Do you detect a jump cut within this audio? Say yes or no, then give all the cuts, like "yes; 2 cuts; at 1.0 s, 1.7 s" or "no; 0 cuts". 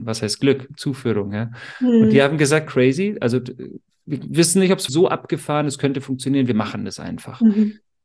yes; 2 cuts; at 2.7 s, 4.9 s